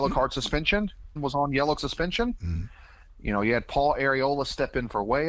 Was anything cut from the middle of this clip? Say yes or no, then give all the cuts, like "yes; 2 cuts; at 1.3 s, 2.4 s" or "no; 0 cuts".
yes; 2 cuts; at 1.2 s, 1.8 s